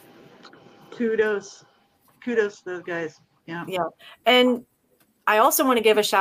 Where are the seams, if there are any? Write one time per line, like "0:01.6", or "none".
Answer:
none